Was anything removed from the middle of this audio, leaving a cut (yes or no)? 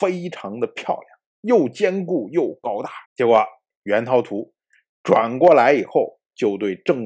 yes